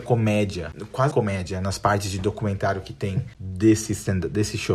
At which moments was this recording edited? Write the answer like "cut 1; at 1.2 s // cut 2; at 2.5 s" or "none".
cut 1; at 1.1 s

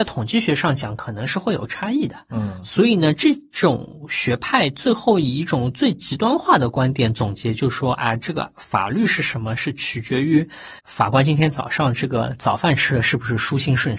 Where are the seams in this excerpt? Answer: cut 1; at 10.8 s

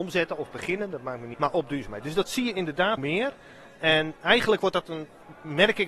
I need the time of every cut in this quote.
cut 1; at 1.3 s // cut 2; at 3.0 s

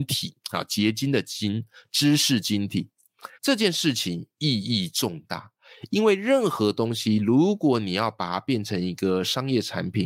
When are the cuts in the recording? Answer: cut 1; at 3.4 s

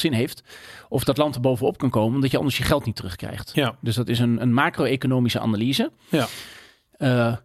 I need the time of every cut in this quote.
none

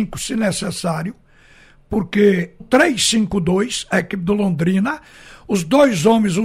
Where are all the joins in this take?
cut 1; at 2.6 s

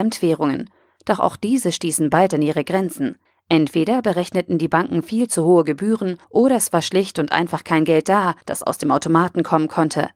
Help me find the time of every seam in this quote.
cut 1; at 3.3 s // cut 2; at 6.2 s // cut 3; at 8.4 s

